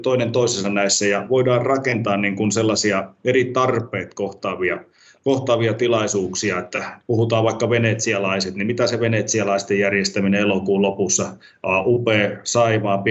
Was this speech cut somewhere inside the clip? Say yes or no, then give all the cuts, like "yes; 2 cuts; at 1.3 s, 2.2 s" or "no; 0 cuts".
no; 0 cuts